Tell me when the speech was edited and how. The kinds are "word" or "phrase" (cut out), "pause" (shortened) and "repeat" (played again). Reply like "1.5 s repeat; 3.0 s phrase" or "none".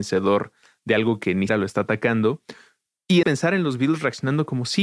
1.5 s word; 3.2 s word